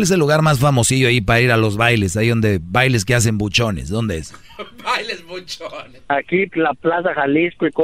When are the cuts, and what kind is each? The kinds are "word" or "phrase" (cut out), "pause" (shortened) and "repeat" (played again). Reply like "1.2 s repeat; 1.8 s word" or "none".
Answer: 6.5 s word

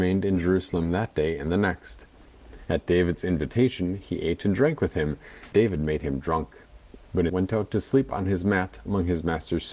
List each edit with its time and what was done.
5.5 s word; 7.3 s phrase

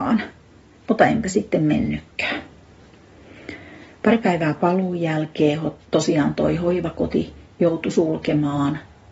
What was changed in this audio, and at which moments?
5.8 s pause

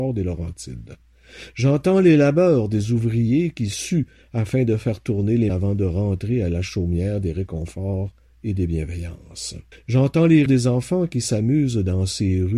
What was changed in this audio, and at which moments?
5.5 s word; 9.7 s pause; 10.5 s word

